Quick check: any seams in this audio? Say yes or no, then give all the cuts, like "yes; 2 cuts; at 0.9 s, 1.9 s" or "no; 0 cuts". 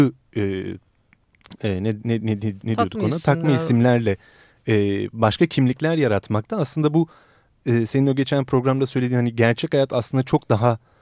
no; 0 cuts